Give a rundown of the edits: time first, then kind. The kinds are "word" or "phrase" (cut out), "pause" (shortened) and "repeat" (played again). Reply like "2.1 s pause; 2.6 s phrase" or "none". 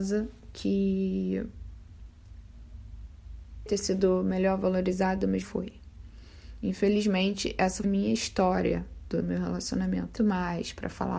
3.7 s word; 5.4 s word; 7.8 s word; 9.2 s word; 10.2 s word